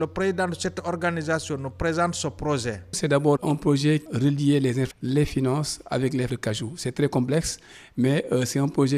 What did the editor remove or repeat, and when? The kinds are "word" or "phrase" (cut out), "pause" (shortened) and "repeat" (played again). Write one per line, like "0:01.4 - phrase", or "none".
0:03.4 - word
0:04.1 - phrase
0:04.9 - word
0:06.3 - word